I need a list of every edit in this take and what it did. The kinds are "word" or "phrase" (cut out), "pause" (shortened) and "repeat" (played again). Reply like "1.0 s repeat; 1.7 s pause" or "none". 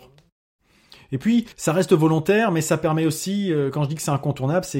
1.5 s pause